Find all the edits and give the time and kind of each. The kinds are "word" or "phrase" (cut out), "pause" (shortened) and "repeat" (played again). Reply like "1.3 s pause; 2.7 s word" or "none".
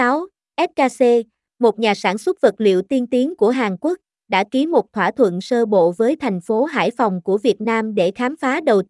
none